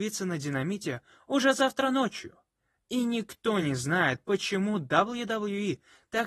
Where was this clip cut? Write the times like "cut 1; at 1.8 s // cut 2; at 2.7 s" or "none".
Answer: none